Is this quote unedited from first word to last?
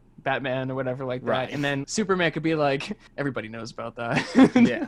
no; 2 cuts; at 1.8 s, 3.1 s

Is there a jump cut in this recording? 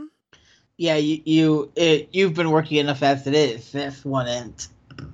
no; 0 cuts

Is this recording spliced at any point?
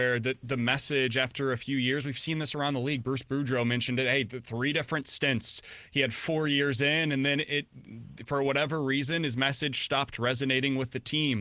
no; 0 cuts

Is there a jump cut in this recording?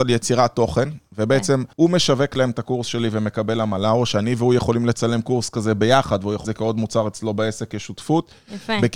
yes; 2 cuts; at 1.7 s, 6.4 s

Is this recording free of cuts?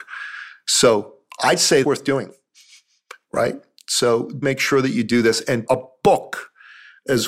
no; 3 cuts; at 1.8 s, 4.4 s, 5.7 s

